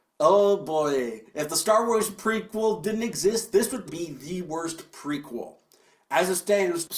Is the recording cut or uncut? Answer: cut